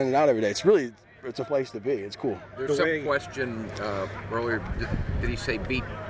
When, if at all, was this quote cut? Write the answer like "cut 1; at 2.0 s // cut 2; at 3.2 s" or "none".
cut 1; at 1.5 s